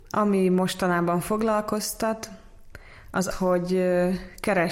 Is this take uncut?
no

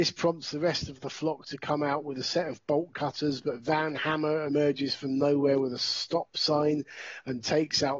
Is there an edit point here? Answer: no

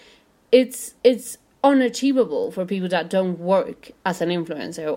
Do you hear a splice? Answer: yes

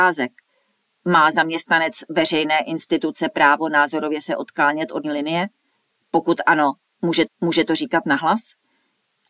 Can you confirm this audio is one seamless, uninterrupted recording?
no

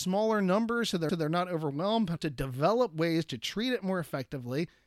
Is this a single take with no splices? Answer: no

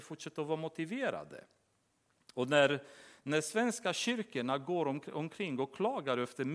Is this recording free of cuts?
yes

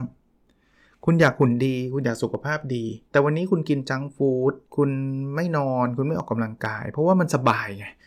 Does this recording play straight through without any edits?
no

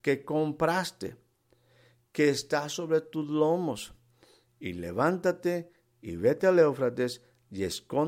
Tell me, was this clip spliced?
no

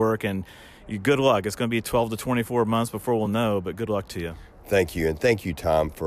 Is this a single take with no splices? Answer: yes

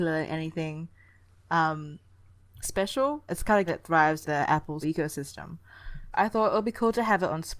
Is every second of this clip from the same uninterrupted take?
no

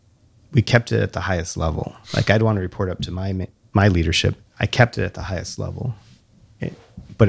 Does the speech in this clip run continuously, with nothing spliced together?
no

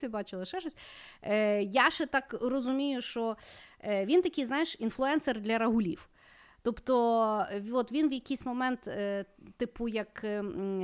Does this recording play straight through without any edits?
yes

